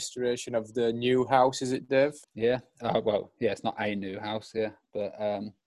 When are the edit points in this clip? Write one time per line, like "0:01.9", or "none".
0:02.2